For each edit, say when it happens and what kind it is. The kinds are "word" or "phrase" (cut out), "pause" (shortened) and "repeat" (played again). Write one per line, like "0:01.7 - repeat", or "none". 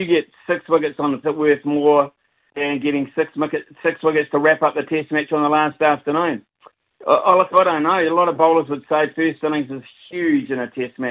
0:01.2 - phrase